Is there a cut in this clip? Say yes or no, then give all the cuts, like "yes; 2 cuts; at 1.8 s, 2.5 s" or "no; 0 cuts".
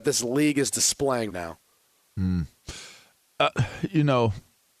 yes; 1 cut; at 1.3 s